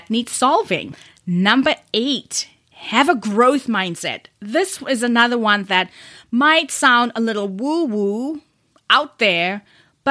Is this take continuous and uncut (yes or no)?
yes